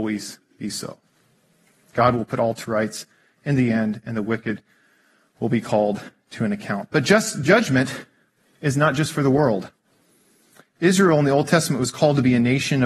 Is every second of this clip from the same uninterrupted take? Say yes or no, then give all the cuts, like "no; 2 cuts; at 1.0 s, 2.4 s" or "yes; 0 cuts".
yes; 0 cuts